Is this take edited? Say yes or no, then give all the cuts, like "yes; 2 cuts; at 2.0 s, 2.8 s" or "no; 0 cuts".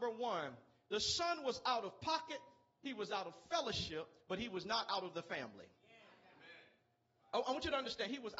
no; 0 cuts